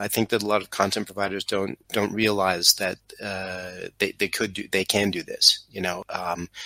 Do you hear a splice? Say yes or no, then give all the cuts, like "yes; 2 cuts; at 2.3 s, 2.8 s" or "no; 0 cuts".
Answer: yes; 1 cut; at 1.8 s